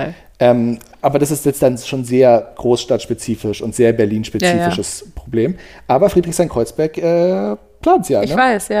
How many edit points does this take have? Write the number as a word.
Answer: zero